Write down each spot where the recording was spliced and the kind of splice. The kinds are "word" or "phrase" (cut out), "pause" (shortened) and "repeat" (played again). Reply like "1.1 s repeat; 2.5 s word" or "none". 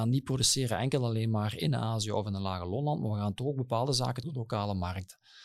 4.2 s phrase